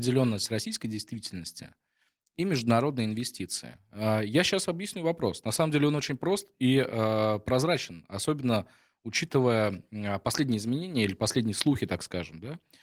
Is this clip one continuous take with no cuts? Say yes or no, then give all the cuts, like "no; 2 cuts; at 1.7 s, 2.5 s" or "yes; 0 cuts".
yes; 0 cuts